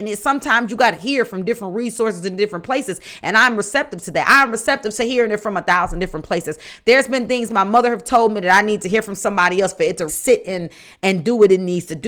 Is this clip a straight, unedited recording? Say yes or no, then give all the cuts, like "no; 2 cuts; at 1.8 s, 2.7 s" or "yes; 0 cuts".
no; 1 cut; at 10.1 s